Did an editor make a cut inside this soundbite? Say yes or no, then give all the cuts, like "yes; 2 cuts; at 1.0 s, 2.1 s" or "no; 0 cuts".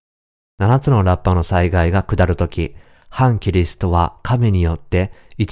no; 0 cuts